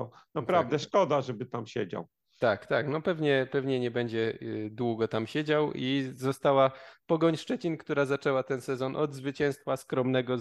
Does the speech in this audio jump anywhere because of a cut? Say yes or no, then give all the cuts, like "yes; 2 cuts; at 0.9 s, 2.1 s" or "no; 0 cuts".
no; 0 cuts